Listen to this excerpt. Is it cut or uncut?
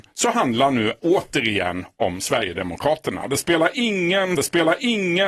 cut